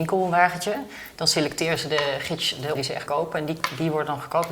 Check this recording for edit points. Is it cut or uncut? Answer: cut